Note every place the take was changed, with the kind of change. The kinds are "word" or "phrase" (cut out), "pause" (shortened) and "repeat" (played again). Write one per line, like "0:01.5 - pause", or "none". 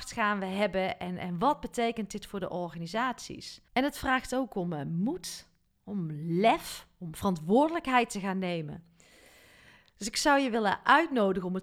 0:03.7 - pause

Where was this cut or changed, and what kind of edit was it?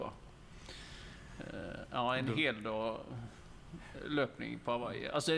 none

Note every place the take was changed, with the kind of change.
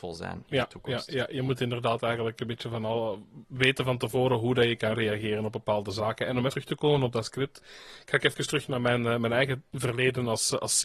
0:06.5 - word

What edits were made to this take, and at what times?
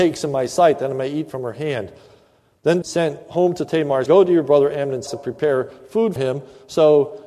0:02.8 - word
0:04.1 - word
0:05.1 - word
0:06.2 - word

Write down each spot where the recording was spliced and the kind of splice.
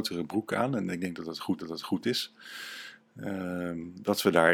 0:01.6 - repeat

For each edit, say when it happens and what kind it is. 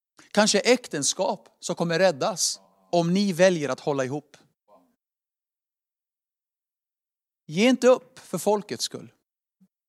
none

